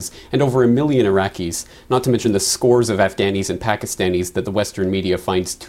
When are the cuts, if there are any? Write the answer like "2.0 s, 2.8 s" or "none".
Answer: none